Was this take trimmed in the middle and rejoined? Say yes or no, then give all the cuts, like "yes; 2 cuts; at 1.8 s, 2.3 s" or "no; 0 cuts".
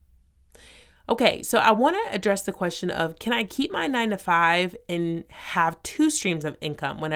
no; 0 cuts